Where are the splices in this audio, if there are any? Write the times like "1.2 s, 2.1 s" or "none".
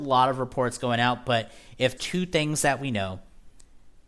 2.0 s